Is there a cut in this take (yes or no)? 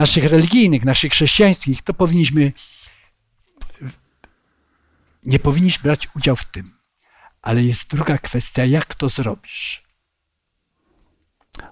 no